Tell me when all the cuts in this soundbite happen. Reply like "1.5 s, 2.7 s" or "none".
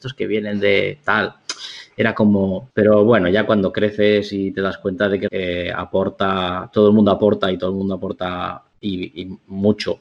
2.7 s, 5.3 s